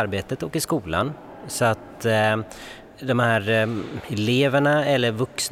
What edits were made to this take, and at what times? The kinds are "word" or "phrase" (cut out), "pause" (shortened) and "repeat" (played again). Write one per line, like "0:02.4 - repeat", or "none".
0:02.9 - pause